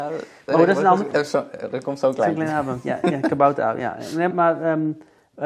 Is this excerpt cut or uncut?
cut